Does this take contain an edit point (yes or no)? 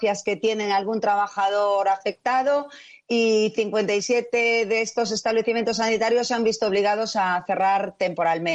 no